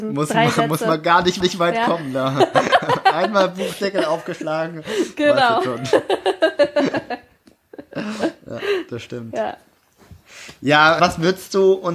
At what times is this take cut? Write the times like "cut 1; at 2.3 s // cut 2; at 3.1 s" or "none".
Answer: cut 1; at 1.4 s // cut 2; at 11.0 s